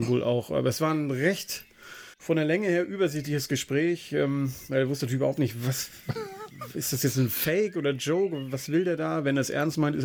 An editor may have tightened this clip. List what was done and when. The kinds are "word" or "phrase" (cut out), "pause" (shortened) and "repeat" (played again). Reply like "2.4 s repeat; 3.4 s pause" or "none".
2.1 s pause